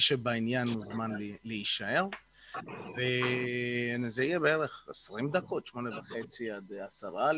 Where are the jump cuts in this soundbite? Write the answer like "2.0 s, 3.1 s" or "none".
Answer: none